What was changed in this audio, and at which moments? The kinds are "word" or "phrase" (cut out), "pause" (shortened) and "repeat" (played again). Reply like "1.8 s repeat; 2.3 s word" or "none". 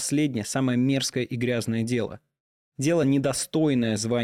none